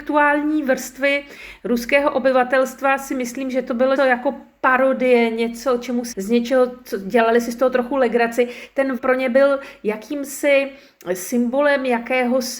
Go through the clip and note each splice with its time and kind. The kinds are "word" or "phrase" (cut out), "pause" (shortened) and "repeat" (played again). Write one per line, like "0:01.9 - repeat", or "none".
0:04.0 - word
0:06.1 - word
0:09.0 - word